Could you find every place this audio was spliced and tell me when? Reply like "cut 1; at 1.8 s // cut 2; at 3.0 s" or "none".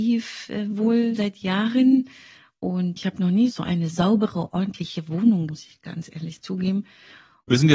cut 1; at 1.2 s // cut 2; at 5.5 s